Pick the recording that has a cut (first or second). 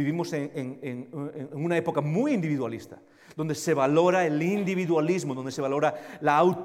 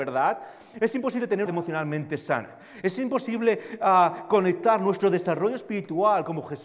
second